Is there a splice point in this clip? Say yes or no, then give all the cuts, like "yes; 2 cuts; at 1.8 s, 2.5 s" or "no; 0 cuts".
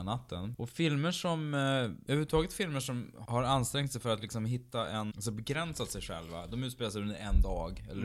yes; 1 cut; at 5.1 s